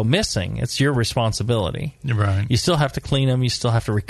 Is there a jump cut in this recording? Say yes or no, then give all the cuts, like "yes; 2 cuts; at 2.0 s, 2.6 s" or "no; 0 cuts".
no; 0 cuts